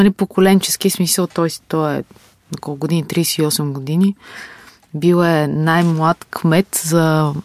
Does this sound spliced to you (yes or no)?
no